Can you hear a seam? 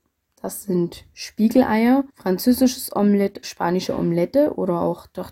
yes; 2 cuts; at 2.1 s, 3.4 s

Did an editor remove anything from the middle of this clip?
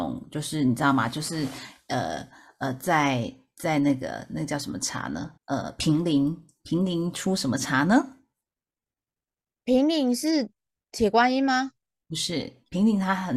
yes; 1 cut; at 5.4 s

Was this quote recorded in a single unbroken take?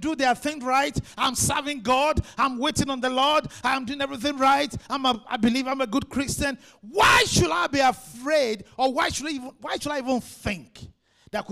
yes; 0 cuts

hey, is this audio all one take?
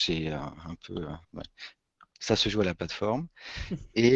no; 1 cut; at 1.2 s

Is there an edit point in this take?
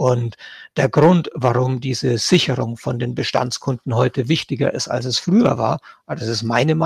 no; 0 cuts

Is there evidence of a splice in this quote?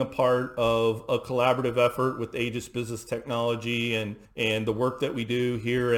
yes; 1 cut; at 4.2 s

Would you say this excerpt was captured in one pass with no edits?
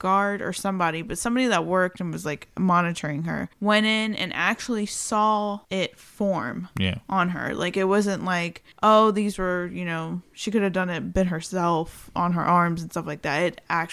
no; 3 cuts; at 3.5 s, 5.6 s, 8.7 s

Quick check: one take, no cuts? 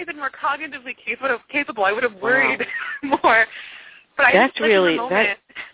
yes; 0 cuts

